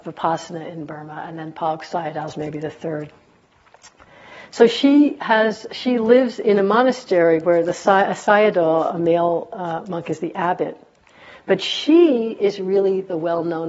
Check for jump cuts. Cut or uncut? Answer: uncut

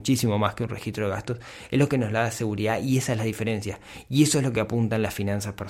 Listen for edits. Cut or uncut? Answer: uncut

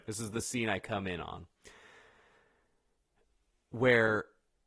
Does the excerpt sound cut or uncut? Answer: uncut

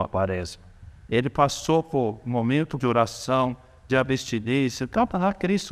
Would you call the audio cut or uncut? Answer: cut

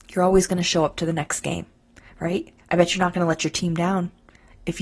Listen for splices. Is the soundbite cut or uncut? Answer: uncut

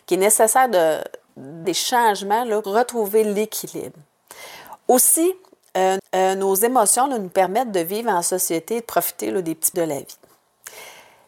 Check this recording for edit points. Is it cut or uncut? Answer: cut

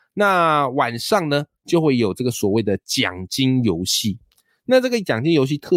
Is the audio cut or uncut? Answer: uncut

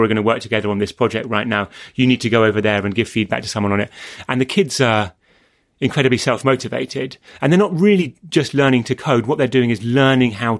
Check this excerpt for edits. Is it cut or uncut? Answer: uncut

